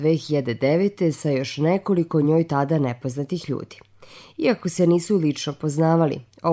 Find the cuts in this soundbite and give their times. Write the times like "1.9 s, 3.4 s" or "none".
none